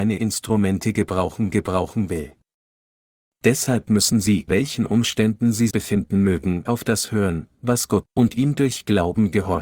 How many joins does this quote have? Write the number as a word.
five